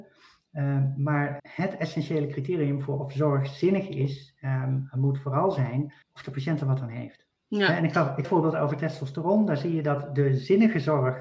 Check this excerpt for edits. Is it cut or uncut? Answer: cut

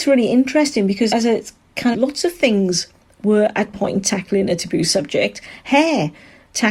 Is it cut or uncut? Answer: cut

